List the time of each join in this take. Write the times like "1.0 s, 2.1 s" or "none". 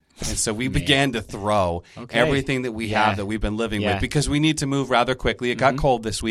none

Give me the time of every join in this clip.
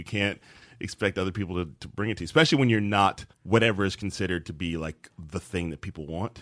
3.3 s

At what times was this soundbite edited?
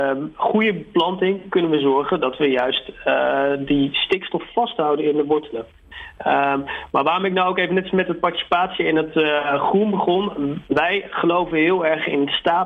none

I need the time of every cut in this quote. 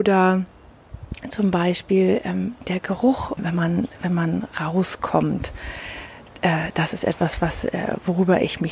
3.4 s

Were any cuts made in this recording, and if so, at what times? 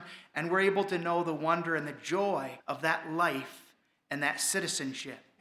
2.6 s

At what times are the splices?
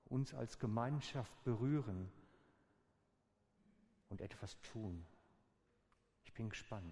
none

